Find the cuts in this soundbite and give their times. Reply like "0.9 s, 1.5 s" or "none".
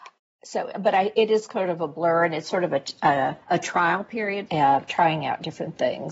3.4 s, 4.5 s